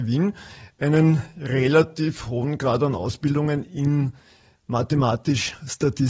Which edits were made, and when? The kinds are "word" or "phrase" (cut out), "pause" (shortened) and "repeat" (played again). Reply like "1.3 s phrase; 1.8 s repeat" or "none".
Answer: none